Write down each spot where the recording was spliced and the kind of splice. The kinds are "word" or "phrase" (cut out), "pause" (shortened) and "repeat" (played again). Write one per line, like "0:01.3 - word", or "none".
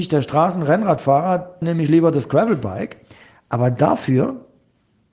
0:01.6 - word